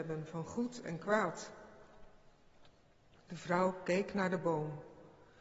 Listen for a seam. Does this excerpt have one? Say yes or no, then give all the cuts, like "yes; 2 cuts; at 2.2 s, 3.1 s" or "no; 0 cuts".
no; 0 cuts